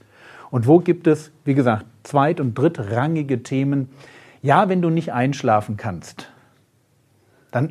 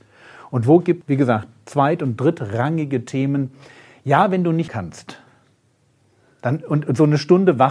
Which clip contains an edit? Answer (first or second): second